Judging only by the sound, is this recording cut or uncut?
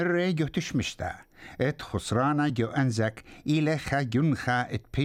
uncut